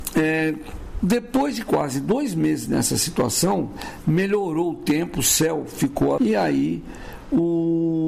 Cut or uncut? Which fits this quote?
cut